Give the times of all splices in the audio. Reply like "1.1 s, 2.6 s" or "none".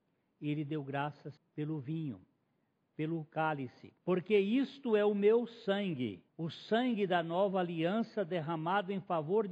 1.4 s, 4.0 s, 6.3 s